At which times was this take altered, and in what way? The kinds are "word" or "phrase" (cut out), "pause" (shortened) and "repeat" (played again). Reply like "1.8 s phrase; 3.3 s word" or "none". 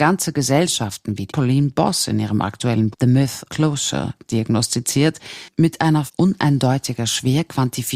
1.3 s word; 2.9 s word; 3.5 s word; 6.1 s word